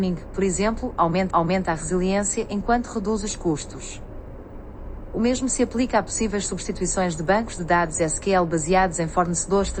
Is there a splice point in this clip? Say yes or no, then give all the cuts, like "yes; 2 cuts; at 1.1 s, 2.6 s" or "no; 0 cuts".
yes; 1 cut; at 1.3 s